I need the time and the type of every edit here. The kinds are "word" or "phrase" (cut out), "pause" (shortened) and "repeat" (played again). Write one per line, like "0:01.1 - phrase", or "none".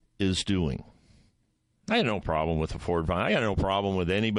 none